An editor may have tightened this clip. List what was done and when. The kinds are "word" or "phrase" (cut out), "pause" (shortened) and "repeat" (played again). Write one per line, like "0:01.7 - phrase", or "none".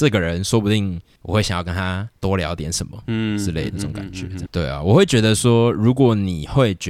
0:02.2 - pause
0:03.7 - word
0:04.5 - word